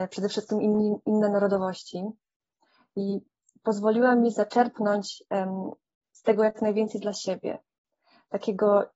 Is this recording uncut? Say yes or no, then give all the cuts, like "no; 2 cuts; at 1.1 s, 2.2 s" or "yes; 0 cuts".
yes; 0 cuts